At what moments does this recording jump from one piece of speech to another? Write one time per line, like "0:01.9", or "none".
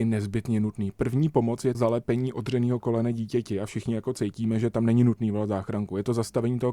0:01.7